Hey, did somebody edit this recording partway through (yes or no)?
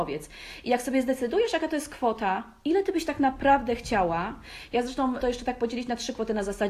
yes